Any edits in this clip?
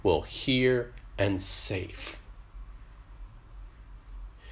no; 0 cuts

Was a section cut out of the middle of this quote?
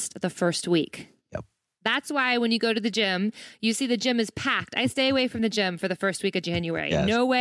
yes; 1 cut; at 1.2 s

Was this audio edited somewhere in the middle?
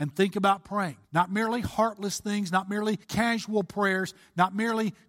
yes; 2 cuts; at 1.0 s, 3.0 s

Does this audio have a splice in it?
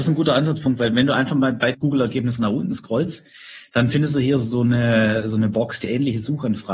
yes; 3 cuts; at 1.7 s, 2.4 s, 5.8 s

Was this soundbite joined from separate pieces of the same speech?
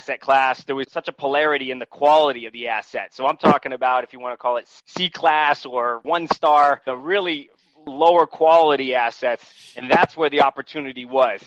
no; 0 cuts

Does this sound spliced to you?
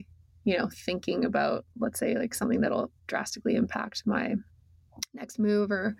no; 0 cuts

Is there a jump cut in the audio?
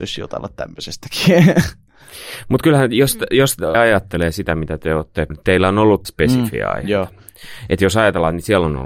yes; 3 cuts; at 3.7 s, 5.3 s, 6.0 s

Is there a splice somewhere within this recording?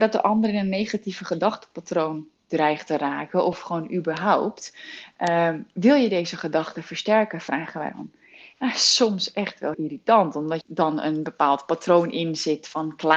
yes; 3 cuts; at 7.9 s, 9.7 s, 10.6 s

